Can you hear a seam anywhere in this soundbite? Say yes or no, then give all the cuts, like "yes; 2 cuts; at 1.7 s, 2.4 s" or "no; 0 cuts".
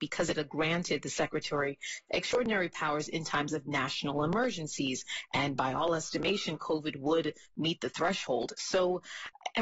no; 0 cuts